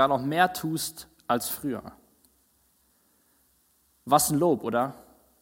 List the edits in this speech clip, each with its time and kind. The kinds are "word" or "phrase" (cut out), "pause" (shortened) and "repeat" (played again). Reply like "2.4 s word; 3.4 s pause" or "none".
none